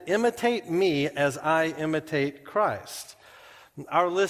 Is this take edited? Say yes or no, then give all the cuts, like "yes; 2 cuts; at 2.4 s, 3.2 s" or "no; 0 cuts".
no; 0 cuts